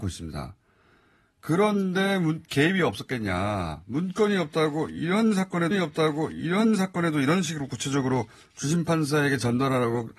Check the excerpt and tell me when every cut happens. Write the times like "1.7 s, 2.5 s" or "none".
5.7 s